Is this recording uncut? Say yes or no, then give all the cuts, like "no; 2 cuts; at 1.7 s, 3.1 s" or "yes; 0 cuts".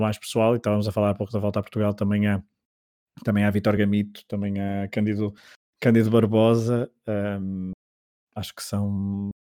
yes; 0 cuts